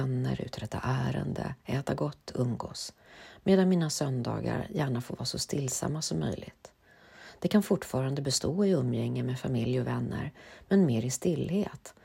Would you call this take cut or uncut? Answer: uncut